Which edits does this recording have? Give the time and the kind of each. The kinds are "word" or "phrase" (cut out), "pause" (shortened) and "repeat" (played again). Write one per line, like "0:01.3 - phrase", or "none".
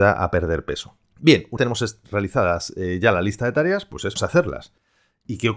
0:01.1 - pause
0:01.6 - word
0:04.2 - word